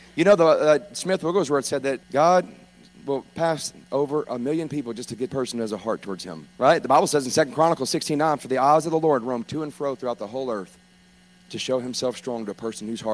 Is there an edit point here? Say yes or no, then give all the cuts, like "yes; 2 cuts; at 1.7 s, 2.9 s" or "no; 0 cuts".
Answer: yes; 4 cuts; at 2.0 s, 3.8 s, 5.3 s, 6.5 s